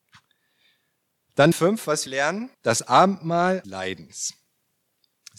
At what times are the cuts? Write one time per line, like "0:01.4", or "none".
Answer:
0:01.5
0:02.1
0:02.5
0:03.6